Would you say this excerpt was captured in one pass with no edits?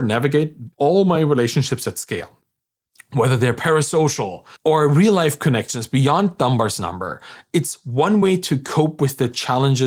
yes; 0 cuts

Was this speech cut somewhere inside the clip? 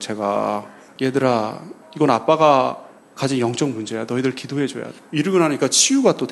no; 0 cuts

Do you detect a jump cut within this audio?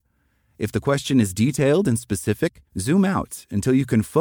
yes; 1 cut; at 2.7 s

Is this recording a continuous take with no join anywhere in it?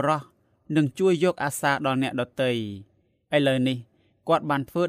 yes; 0 cuts

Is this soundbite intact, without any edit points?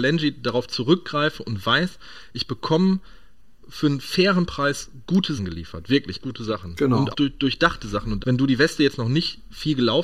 no; 5 cuts; at 3.6 s, 5.4 s, 6.2 s, 7.1 s, 8.2 s

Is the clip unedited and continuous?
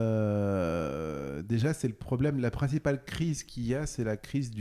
yes; 0 cuts

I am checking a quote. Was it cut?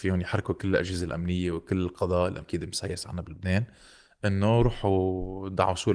yes; 1 cut; at 2.4 s

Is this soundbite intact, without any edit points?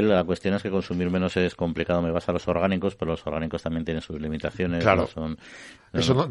yes; 0 cuts

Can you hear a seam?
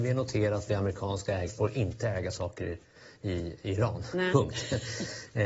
yes; 1 cut; at 1.5 s

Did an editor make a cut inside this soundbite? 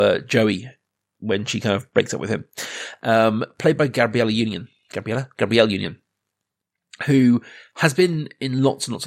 no; 0 cuts

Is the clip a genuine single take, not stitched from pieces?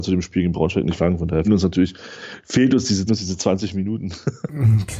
no; 3 cuts; at 1.0 s, 1.4 s, 3.1 s

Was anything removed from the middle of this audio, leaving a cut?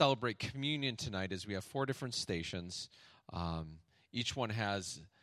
no; 0 cuts

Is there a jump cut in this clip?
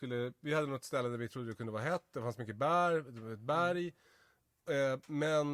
no; 0 cuts

